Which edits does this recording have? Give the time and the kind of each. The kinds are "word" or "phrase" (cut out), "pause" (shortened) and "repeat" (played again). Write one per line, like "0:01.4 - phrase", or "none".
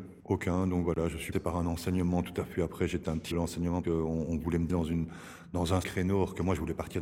0:01.3 - word
0:02.5 - word
0:03.3 - word
0:03.8 - word
0:04.7 - word
0:05.8 - word

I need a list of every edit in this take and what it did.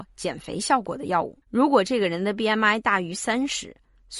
0:01.4 - pause

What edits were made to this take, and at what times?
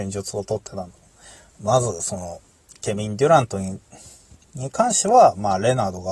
none

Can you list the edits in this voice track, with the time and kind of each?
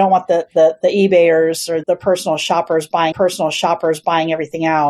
0:01.8 - word
0:03.1 - repeat

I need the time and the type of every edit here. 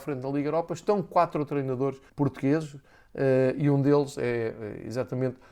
0:02.1 - pause

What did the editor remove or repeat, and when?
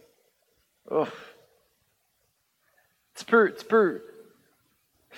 none

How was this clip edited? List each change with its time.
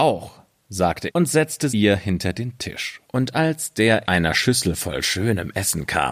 0:01.1 - word
0:01.7 - phrase
0:03.0 - pause
0:04.0 - phrase

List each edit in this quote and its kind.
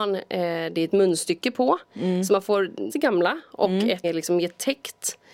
0:00.9 - word
0:02.9 - word
0:04.0 - word

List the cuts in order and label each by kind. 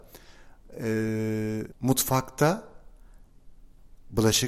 0:01.7 - pause

